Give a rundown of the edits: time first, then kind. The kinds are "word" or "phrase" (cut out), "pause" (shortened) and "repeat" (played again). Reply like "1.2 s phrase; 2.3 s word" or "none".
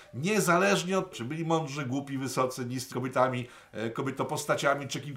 1.1 s word; 2.9 s word